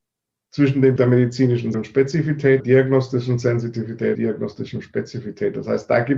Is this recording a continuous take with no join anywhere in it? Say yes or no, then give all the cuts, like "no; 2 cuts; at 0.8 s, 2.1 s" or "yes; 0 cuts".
no; 4 cuts; at 1.0 s, 1.7 s, 2.6 s, 4.1 s